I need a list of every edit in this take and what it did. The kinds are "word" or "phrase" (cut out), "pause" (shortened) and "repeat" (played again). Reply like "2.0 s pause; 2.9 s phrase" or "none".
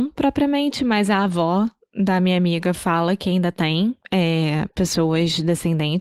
4.0 s pause